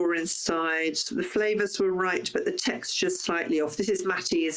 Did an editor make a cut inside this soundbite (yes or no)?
no